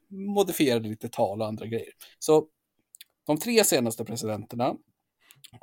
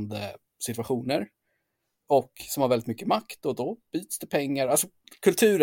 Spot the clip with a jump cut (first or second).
first